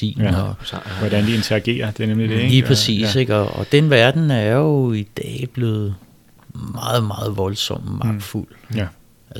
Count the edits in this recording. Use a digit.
0